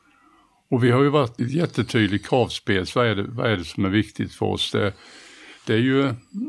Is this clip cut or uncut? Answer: cut